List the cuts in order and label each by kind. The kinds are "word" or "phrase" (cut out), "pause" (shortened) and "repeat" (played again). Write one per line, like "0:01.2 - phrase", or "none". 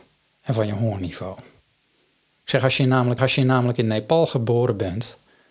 0:03.2 - repeat

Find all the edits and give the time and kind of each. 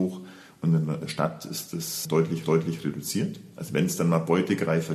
0:01.0 - word
0:02.4 - repeat

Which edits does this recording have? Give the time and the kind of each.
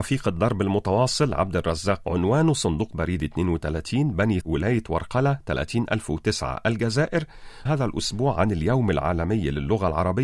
0:02.0 - word
0:04.4 - word
0:07.7 - word

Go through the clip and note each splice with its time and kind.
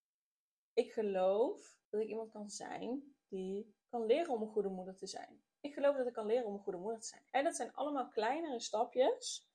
0:01.8 - pause
0:03.8 - pause
0:07.3 - pause

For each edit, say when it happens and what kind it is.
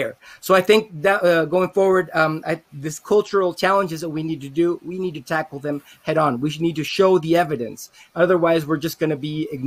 none

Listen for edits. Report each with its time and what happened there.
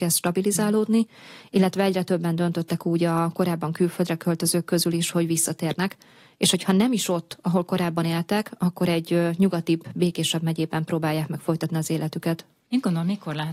none

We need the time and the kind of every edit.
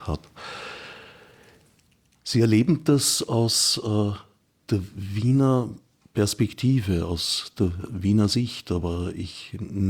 none

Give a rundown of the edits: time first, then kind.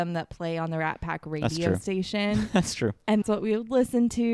0:03.2 - word

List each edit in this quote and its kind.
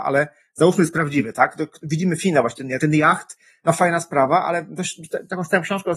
none

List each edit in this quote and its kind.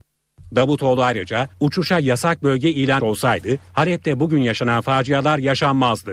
0:01.5 - pause
0:03.0 - word
0:03.7 - pause

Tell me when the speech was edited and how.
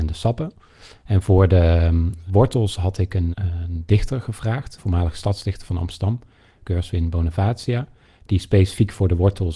0:02.3 - word
0:03.3 - word
0:04.8 - word

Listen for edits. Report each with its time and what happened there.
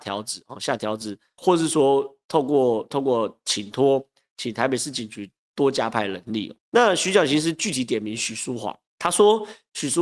0:06.6 - pause

